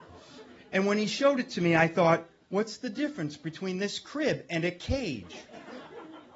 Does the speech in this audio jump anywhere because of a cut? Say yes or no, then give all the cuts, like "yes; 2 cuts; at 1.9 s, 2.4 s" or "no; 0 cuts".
no; 0 cuts